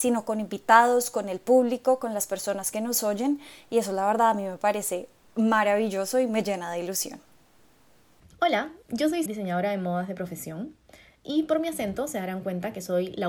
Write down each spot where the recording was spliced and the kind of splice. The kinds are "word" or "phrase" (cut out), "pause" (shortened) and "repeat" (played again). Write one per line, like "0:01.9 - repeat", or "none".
0:09.3 - phrase